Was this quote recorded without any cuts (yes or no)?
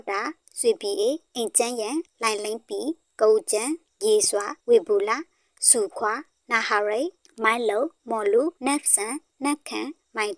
no